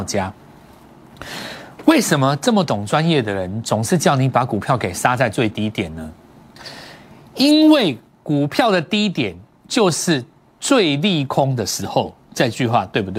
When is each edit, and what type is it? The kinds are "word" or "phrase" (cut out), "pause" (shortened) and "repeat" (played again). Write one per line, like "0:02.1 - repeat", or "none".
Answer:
none